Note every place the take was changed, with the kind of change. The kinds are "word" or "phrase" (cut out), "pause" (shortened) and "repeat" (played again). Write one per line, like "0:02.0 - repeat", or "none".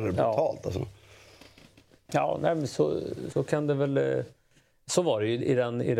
0:03.3 - word

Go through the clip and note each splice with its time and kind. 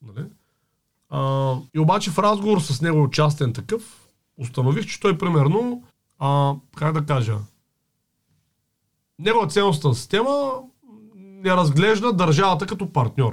0:01.7 - pause
0:05.9 - pause

